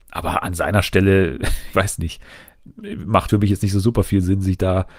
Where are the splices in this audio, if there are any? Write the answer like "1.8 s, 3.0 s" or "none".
1.7 s, 3.3 s